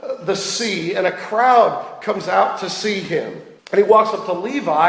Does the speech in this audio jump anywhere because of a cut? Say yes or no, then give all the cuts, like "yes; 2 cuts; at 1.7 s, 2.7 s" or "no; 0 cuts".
yes; 1 cut; at 3.6 s